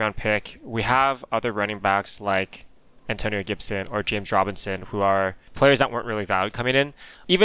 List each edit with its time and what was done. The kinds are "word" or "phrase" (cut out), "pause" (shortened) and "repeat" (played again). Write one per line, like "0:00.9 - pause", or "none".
none